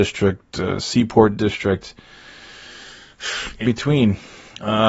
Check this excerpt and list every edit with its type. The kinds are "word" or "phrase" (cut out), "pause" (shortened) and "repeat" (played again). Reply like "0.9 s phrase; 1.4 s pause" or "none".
3.6 s phrase